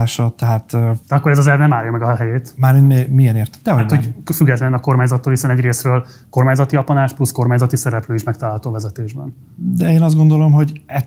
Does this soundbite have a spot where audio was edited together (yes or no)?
yes